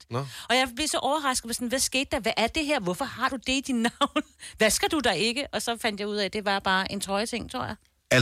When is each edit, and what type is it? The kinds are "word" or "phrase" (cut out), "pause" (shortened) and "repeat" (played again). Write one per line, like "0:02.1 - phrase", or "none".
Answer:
none